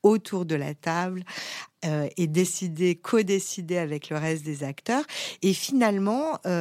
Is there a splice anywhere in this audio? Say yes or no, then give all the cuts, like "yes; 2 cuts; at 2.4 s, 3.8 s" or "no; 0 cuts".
no; 0 cuts